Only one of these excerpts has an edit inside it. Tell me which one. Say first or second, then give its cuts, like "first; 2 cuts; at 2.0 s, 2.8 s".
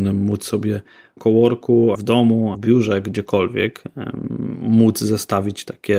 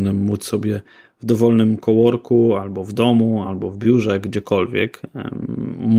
first; 3 cuts; at 1.2 s, 1.9 s, 2.5 s